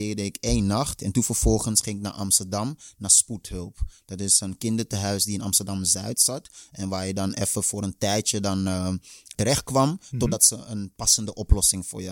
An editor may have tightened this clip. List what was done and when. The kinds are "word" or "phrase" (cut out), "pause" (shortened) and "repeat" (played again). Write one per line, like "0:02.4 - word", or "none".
0:09.3 - word

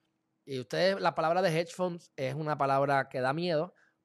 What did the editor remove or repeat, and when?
none

